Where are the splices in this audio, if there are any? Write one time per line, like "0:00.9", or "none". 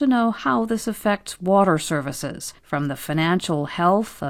0:02.6